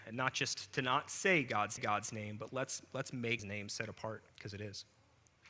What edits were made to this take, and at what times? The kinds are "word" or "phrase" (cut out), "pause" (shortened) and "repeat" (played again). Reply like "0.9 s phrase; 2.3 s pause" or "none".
1.8 s repeat; 2.5 s word; 3.4 s word; 4.3 s pause